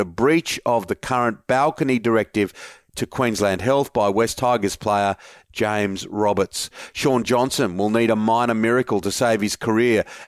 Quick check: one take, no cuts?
yes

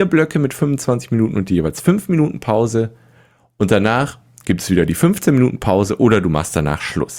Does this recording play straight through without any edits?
yes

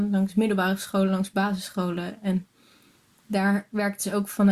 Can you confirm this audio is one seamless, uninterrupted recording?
yes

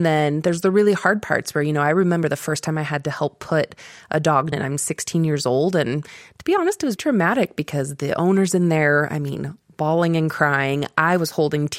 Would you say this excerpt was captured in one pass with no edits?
no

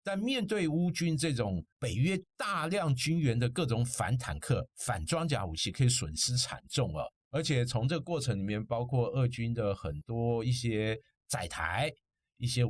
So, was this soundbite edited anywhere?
yes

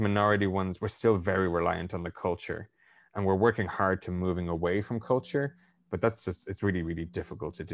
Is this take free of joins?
yes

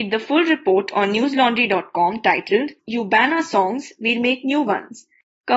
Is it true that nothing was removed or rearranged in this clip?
no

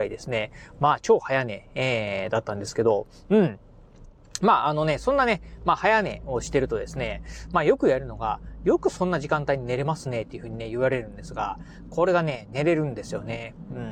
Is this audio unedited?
yes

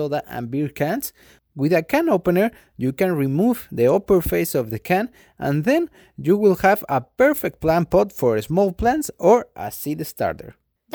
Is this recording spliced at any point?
no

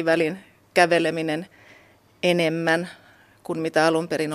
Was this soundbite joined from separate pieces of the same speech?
no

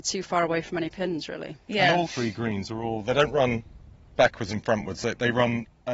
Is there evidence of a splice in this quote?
yes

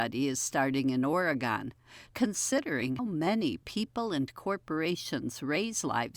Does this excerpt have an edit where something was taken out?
yes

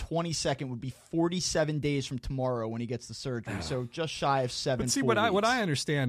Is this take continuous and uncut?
yes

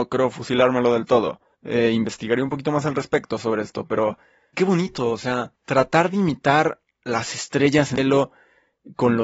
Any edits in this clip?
yes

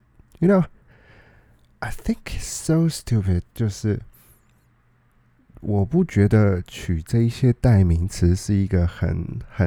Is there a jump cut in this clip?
no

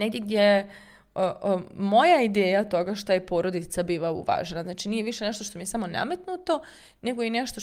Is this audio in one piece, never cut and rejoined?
yes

